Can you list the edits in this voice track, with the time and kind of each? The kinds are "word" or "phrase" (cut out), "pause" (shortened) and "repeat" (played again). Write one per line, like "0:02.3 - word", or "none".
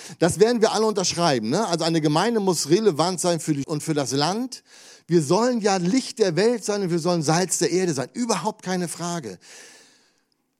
0:03.6 - word